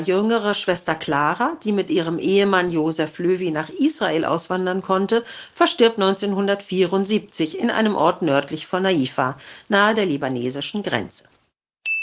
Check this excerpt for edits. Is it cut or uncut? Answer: uncut